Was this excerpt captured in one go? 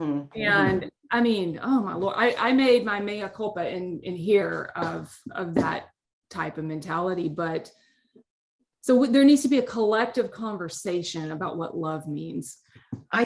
yes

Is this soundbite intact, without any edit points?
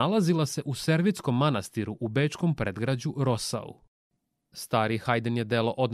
yes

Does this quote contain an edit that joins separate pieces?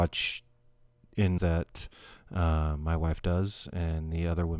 yes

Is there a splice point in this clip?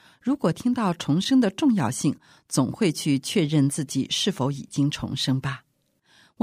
no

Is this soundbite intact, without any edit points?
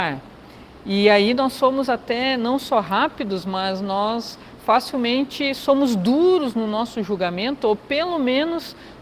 yes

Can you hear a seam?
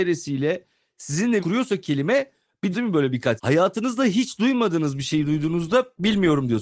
yes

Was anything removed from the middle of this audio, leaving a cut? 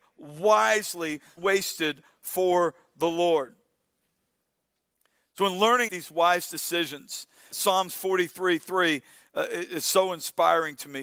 yes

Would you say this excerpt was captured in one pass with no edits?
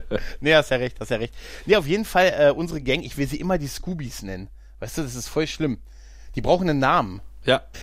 yes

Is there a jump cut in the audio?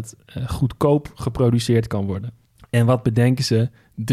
yes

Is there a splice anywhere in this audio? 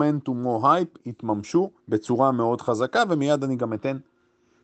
yes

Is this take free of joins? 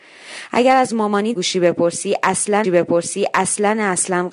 no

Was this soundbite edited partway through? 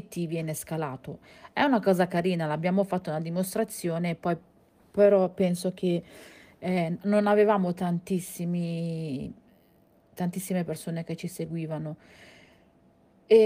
no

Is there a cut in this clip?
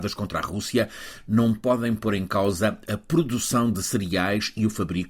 no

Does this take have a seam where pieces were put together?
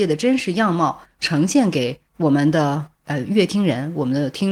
yes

